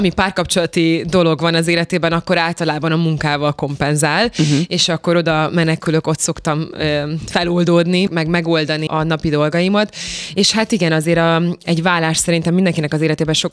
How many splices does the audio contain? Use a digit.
2